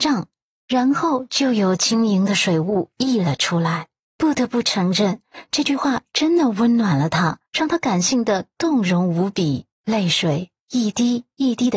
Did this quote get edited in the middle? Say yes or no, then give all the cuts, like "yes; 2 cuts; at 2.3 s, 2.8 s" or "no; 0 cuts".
yes; 3 cuts; at 4.0 s, 7.5 s, 9.7 s